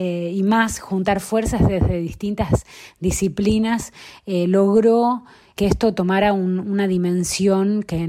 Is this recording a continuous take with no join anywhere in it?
yes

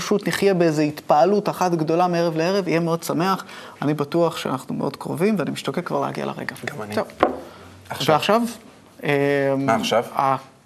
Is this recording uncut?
yes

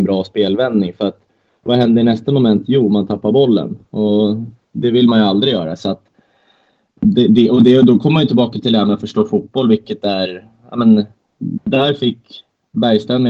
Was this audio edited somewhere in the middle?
no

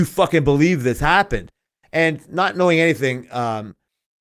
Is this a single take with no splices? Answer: yes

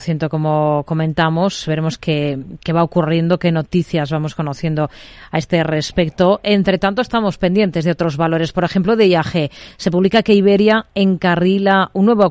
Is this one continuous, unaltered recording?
yes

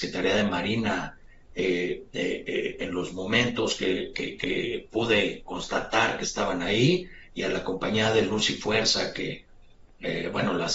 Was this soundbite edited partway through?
no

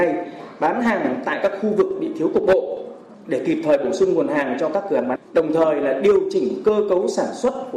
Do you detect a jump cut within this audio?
yes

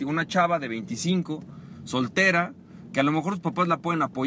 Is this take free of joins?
yes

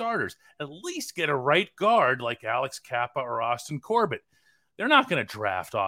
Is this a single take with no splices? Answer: yes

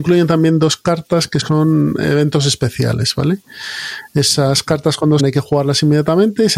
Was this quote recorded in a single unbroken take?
no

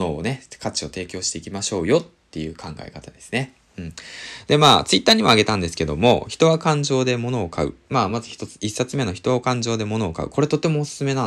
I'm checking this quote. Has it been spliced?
no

